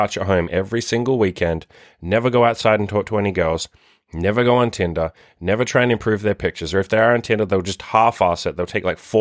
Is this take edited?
no; 0 cuts

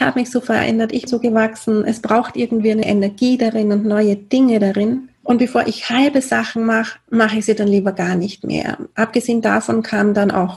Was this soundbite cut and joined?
yes; 3 cuts; at 1.1 s, 2.8 s, 5.1 s

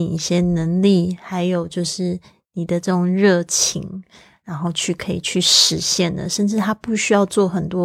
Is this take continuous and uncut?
yes; 0 cuts

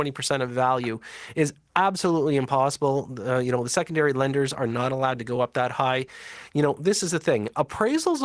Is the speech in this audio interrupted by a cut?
no; 0 cuts

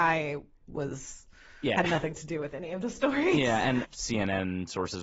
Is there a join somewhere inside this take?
yes; 2 cuts; at 1.8 s, 3.8 s

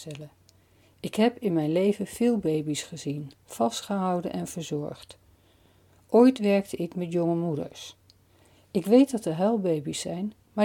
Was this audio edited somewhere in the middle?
no; 0 cuts

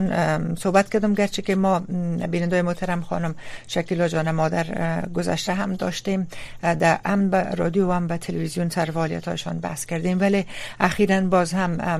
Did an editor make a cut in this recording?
no; 0 cuts

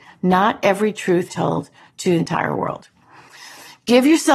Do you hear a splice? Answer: yes; 2 cuts; at 1.3 s, 2.2 s

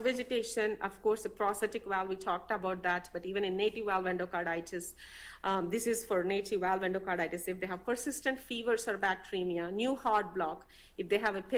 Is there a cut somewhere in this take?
no; 0 cuts

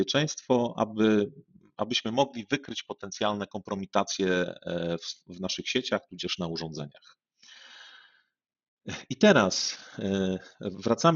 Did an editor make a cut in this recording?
no; 0 cuts

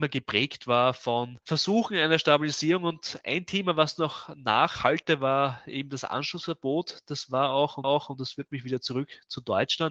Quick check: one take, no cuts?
no; 1 cut; at 7.8 s

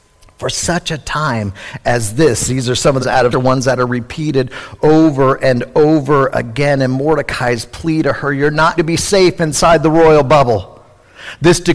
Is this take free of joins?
no; 3 cuts; at 3.0 s, 3.3 s, 8.8 s

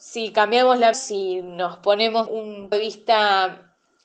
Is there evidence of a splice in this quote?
yes; 3 cuts; at 0.9 s, 2.3 s, 2.7 s

